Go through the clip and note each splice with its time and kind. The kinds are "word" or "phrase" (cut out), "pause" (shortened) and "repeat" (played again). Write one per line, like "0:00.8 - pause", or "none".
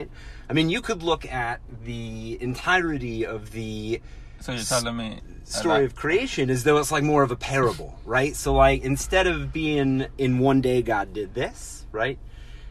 none